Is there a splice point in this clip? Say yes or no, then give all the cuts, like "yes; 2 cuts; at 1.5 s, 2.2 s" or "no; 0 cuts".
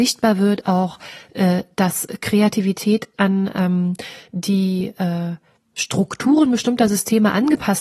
yes; 2 cuts; at 3.1 s, 5.6 s